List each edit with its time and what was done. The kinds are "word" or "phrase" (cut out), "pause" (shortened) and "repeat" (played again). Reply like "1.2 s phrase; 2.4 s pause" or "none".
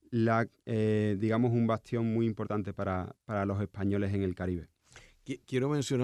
none